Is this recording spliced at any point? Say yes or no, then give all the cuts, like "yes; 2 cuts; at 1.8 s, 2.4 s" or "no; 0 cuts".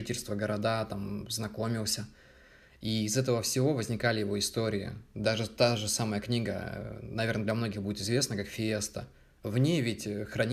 no; 0 cuts